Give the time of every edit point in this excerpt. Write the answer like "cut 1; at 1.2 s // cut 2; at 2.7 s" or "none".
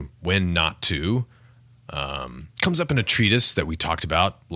cut 1; at 2.5 s